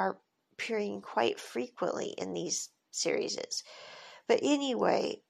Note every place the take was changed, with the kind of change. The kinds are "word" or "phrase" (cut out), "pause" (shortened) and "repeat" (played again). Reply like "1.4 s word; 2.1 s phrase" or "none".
none